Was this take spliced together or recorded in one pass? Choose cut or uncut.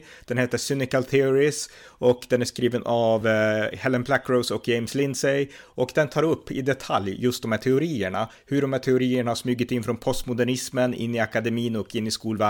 uncut